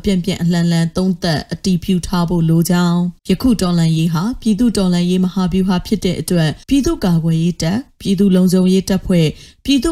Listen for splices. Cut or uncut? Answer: cut